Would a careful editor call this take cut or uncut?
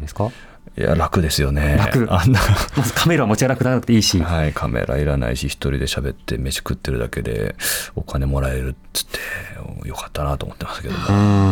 uncut